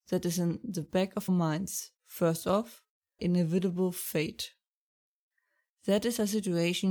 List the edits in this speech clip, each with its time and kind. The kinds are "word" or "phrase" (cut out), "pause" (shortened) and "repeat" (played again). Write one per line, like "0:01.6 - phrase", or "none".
0:01.3 - word
0:02.0 - pause
0:03.2 - phrase